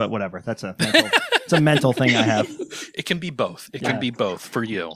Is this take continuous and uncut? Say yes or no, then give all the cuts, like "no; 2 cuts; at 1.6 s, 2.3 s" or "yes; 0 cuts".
yes; 0 cuts